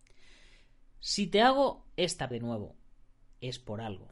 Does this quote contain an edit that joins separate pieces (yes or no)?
yes